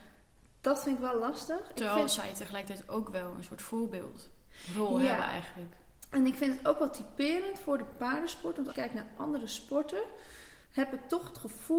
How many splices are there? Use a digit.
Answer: 2